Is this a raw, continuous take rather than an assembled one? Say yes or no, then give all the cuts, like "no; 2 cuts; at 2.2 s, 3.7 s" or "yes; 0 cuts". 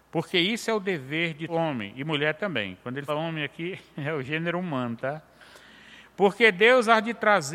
no; 2 cuts; at 1.5 s, 3.1 s